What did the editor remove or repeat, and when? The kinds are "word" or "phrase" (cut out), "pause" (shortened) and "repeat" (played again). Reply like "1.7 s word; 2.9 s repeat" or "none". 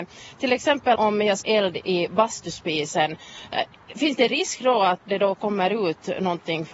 1.0 s word; 1.4 s word; 5.0 s word